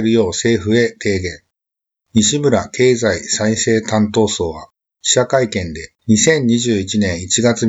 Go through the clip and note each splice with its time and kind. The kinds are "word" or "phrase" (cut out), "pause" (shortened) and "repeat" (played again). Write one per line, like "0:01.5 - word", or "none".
0:06.0 - pause